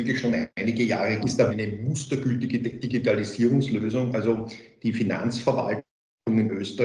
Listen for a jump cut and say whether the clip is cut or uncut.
cut